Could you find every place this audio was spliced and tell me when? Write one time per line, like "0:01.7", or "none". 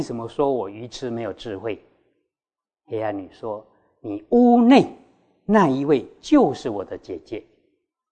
none